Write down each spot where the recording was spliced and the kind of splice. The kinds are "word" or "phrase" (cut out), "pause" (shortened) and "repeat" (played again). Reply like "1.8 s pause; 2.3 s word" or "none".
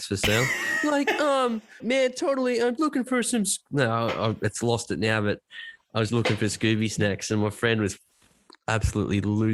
1.8 s word; 2.8 s word; 6.1 s word